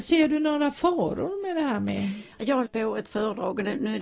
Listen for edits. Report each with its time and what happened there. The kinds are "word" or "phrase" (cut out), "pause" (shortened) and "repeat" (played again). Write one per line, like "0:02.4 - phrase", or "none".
0:02.7 - word